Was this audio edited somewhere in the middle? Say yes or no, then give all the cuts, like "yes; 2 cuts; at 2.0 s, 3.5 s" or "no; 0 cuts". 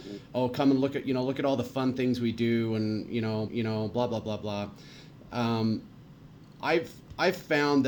yes; 1 cut; at 3.5 s